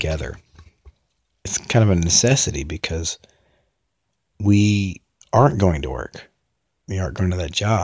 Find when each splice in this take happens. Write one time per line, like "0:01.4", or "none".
none